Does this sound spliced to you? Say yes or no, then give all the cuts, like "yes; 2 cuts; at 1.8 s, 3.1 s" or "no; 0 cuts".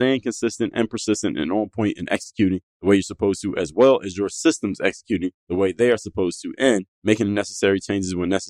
no; 0 cuts